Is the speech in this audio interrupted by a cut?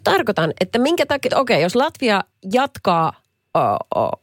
yes; 1 cut; at 1.3 s

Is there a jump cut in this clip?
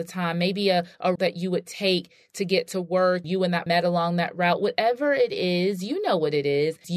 yes; 3 cuts; at 1.2 s, 3.2 s, 3.7 s

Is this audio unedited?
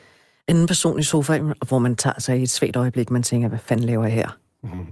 yes; 0 cuts

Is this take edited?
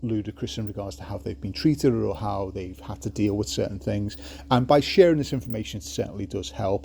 no; 0 cuts

